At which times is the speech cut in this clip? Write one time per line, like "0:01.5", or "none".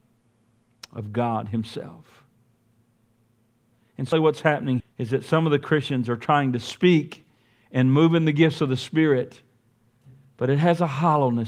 0:04.1
0:04.8